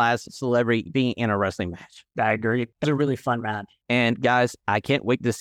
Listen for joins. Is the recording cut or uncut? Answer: cut